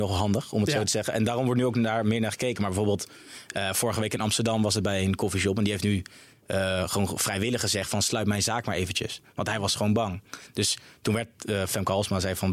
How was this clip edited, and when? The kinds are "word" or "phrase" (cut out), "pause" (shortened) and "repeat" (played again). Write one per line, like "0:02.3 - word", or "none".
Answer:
none